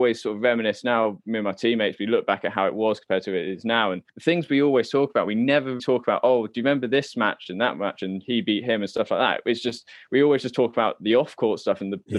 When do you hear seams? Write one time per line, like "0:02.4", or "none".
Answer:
0:04.1
0:05.8